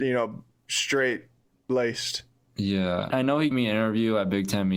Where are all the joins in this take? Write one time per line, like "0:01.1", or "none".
0:01.4
0:03.1
0:03.5

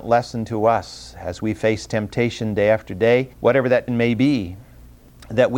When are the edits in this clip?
0:03.3
0:03.9

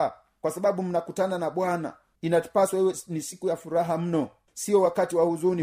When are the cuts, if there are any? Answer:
none

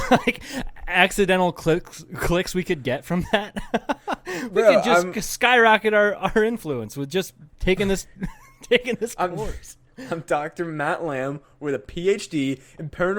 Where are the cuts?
0:07.5

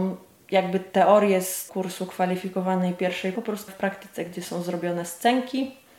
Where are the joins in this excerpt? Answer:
0:01.7
0:03.3
0:03.7

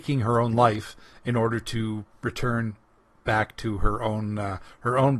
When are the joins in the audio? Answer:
none

